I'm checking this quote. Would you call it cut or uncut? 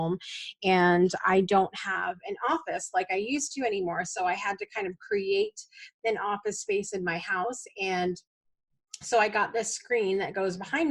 uncut